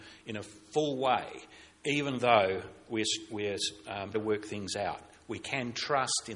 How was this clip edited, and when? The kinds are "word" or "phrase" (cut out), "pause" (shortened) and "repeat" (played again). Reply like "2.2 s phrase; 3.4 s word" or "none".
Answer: 4.1 s word